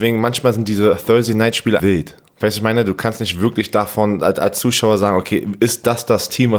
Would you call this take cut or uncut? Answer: cut